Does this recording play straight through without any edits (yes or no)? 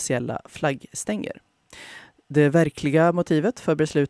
yes